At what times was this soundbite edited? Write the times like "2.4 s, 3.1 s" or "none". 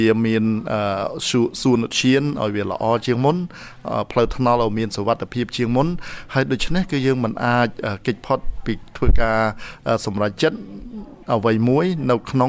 11.2 s